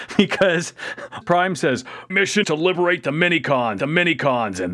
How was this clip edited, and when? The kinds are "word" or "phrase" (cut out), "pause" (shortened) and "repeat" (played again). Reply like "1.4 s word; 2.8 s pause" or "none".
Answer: 1.2 s word; 2.1 s word; 2.4 s word; 3.8 s repeat